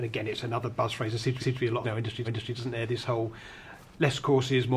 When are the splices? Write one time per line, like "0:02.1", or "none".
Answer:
0:01.4
0:01.8
0:02.2